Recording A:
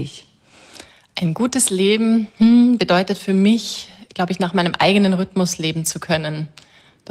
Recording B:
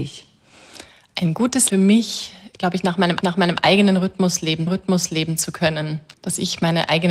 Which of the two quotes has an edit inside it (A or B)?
B